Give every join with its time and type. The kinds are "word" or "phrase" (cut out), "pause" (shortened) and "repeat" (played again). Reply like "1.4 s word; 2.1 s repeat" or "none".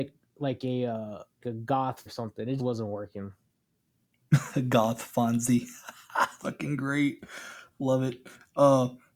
1.4 s word; 2.1 s word; 2.6 s word; 6.4 s word